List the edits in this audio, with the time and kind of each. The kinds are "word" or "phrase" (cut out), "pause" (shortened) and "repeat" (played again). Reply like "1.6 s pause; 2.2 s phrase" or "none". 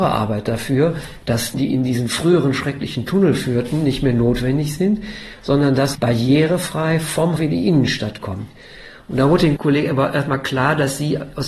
1.5 s word; 5.9 s word; 7.4 s word; 9.6 s word